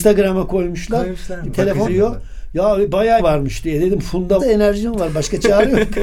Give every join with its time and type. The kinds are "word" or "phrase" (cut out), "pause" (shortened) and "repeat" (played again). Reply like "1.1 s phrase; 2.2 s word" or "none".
1.5 s word; 1.9 s word; 3.2 s word; 4.4 s word